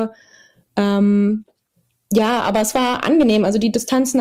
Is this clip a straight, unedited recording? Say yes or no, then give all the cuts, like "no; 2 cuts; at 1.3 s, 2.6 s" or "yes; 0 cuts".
yes; 0 cuts